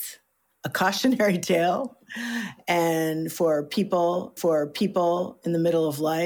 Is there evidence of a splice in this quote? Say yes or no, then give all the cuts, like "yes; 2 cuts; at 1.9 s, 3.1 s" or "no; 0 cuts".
yes; 1 cut; at 4.4 s